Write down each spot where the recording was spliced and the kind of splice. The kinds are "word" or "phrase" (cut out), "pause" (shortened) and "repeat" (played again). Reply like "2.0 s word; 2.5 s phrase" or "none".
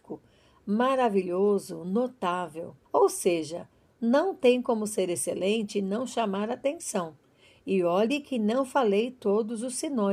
2.9 s pause

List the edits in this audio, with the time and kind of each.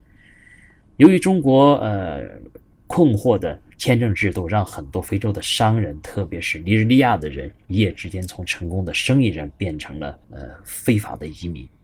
3.7 s pause; 10.2 s pause

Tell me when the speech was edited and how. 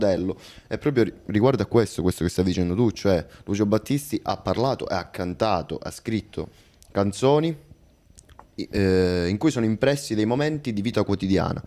none

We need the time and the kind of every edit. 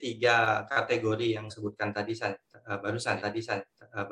1.5 s word; 3.2 s repeat

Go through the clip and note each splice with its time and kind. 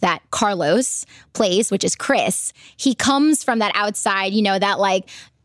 none

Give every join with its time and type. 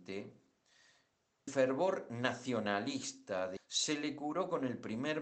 1.5 s word; 3.6 s word

